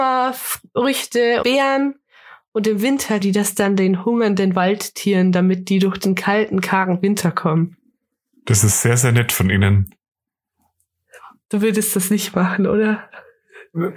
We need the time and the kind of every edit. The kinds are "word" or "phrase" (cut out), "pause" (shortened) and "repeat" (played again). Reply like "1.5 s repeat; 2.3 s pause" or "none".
1.4 s word; 3.2 s word